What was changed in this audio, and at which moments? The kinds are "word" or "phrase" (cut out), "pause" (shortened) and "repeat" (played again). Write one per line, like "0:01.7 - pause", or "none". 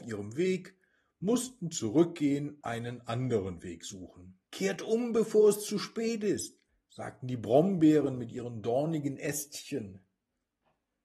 0:02.6 - word
0:04.5 - pause
0:06.7 - pause